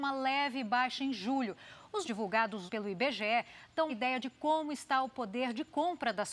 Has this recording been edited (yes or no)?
yes